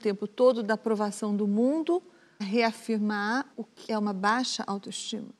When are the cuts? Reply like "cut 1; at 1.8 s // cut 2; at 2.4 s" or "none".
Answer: cut 1; at 2.4 s // cut 2; at 3.5 s // cut 3; at 3.9 s